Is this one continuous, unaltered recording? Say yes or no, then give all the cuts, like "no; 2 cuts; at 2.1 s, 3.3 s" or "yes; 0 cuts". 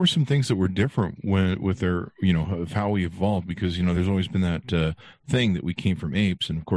yes; 0 cuts